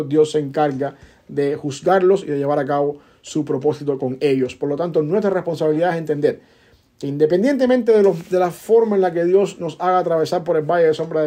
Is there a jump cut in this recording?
no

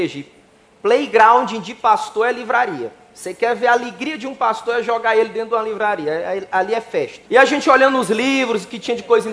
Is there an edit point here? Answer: yes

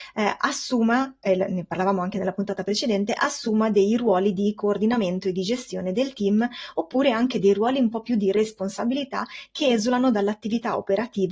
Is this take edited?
no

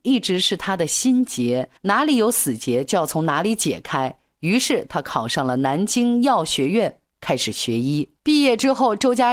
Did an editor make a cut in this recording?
yes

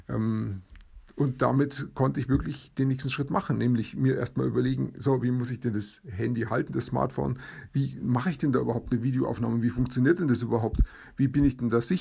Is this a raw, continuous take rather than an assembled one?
yes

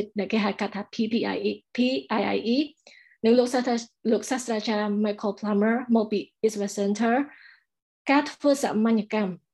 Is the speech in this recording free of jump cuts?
yes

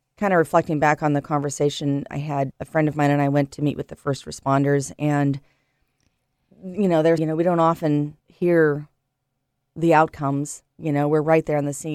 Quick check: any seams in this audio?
yes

